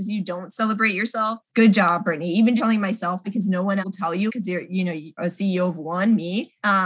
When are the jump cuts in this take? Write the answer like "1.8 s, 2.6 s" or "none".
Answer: 2.6 s, 3.2 s, 3.8 s, 4.3 s, 5.2 s